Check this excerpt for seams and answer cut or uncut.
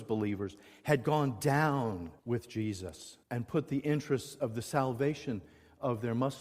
cut